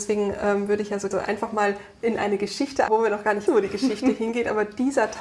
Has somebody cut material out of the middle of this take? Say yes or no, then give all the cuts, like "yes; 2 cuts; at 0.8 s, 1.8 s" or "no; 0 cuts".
yes; 3 cuts; at 1.1 s, 2.9 s, 3.5 s